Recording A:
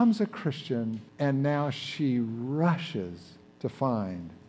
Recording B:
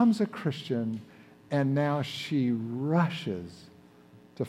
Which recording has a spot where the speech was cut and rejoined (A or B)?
A